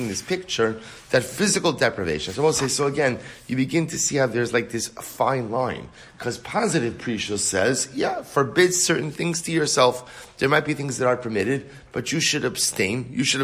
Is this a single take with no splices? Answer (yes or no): yes